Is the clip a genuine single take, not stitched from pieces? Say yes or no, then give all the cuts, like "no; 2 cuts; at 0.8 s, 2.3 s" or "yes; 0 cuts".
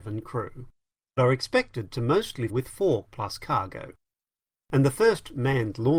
no; 3 cuts; at 1.2 s, 2.5 s, 3.0 s